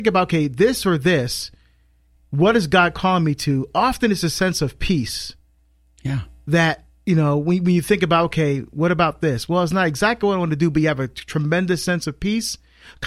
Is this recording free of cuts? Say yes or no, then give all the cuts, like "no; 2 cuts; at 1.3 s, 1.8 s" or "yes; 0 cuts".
yes; 0 cuts